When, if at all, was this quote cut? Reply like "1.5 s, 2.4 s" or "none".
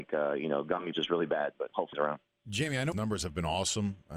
0.9 s, 1.9 s, 2.9 s